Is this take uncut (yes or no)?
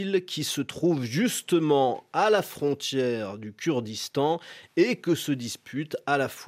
yes